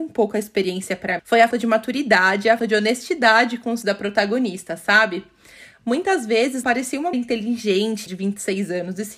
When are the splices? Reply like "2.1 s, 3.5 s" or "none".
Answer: 1.2 s, 1.5 s, 2.6 s, 3.8 s, 6.6 s, 7.1 s, 8.1 s